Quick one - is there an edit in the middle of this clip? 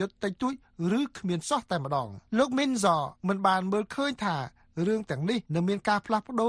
yes; 3 cuts; at 2.3 s, 3.2 s, 5.5 s

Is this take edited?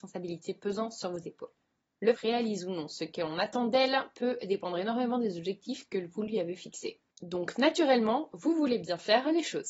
yes; 2 cuts; at 2.1 s, 7.1 s

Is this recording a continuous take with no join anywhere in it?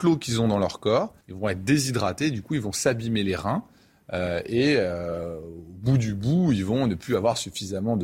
no; 1 cut; at 1.2 s

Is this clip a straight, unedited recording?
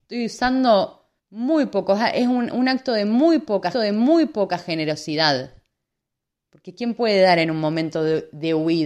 no; 2 cuts; at 1.2 s, 3.7 s

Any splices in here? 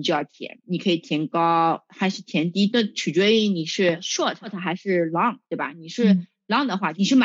yes; 1 cut; at 5.4 s

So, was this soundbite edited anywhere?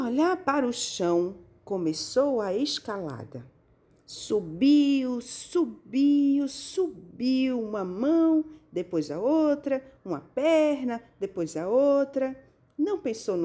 no; 0 cuts

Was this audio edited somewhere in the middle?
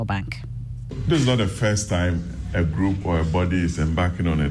no; 0 cuts

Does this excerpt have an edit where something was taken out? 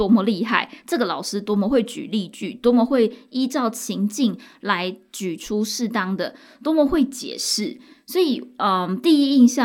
no; 0 cuts

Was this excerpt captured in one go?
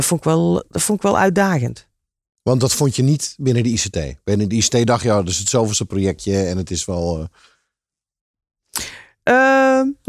yes; 0 cuts

